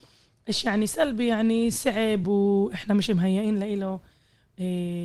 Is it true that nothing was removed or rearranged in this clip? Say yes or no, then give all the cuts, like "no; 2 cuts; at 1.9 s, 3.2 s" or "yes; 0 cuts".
yes; 0 cuts